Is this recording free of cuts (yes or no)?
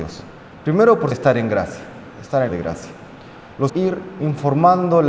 no